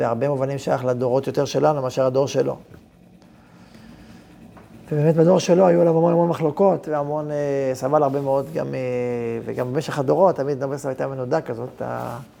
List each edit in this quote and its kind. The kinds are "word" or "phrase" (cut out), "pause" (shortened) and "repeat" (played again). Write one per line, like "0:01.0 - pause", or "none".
none